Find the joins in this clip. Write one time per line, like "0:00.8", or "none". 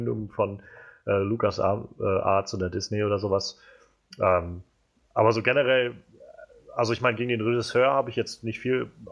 none